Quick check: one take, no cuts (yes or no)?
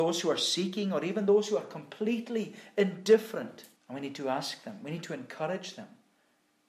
no